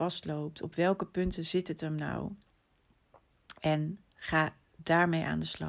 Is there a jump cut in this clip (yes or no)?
no